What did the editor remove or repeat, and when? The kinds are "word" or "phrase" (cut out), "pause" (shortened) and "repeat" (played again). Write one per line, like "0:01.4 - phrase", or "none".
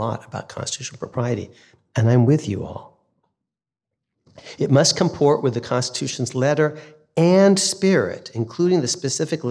none